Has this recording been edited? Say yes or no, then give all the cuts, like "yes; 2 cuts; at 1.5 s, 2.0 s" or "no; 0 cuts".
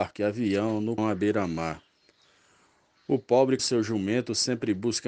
yes; 2 cuts; at 1.0 s, 3.6 s